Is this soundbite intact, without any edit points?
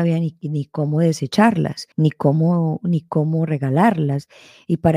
no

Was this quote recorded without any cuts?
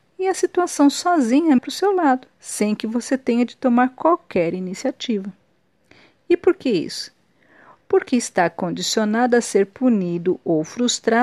no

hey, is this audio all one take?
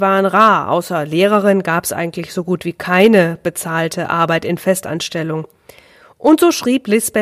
yes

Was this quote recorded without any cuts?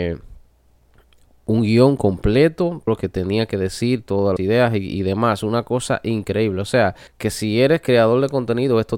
no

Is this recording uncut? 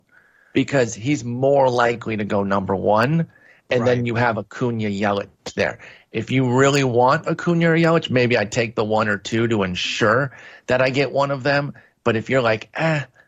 yes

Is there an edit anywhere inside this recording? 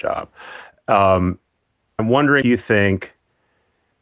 yes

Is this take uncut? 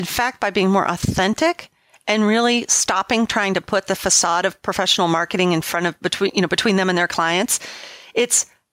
yes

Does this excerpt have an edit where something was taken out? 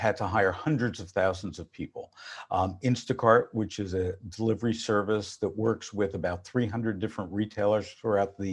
no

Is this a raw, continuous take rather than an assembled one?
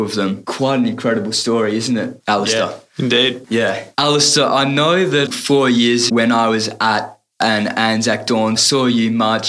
no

